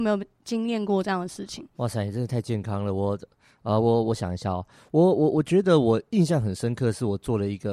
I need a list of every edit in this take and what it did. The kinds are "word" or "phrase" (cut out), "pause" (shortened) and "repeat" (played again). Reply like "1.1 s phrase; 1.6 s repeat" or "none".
none